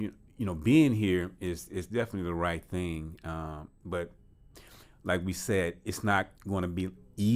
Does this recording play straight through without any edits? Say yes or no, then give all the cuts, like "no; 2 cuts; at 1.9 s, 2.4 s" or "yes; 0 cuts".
no; 1 cut; at 6.4 s